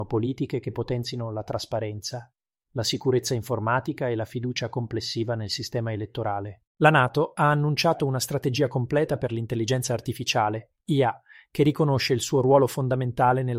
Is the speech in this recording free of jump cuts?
no; 1 cut; at 6.7 s

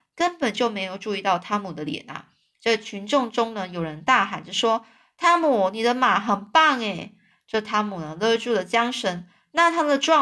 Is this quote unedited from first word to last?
yes; 0 cuts

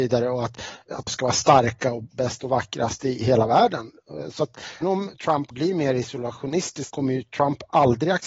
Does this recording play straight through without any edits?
no; 5 cuts; at 1.1 s, 2.1 s, 4.8 s, 5.5 s, 6.9 s

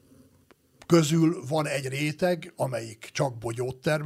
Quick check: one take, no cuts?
yes; 0 cuts

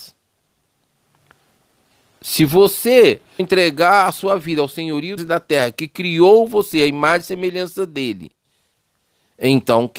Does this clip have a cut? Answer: yes; 2 cuts; at 3.4 s, 5.2 s

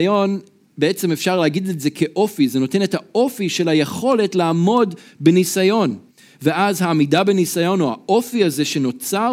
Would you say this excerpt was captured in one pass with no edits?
yes; 0 cuts

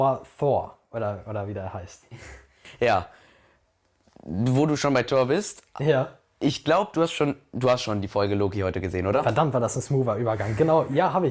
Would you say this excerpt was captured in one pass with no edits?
yes; 0 cuts

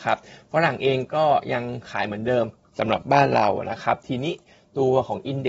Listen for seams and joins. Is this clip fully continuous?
yes; 0 cuts

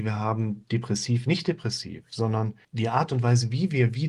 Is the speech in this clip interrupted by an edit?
yes; 1 cut; at 2.6 s

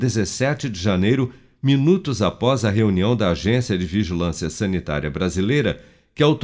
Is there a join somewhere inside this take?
no; 0 cuts

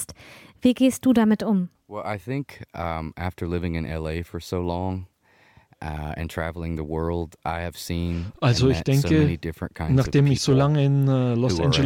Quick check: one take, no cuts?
yes; 0 cuts

